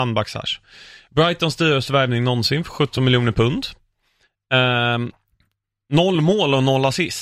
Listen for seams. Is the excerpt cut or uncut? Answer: uncut